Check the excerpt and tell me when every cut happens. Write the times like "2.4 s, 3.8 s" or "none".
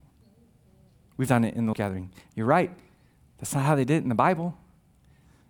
1.3 s, 1.7 s